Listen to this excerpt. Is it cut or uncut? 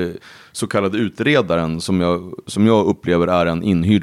uncut